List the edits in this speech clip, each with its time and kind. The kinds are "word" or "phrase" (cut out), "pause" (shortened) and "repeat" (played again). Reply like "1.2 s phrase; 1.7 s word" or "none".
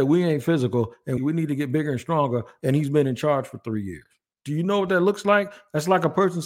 1.2 s word